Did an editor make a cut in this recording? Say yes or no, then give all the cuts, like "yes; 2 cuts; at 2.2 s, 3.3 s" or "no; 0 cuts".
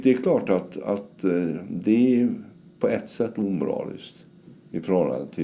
no; 0 cuts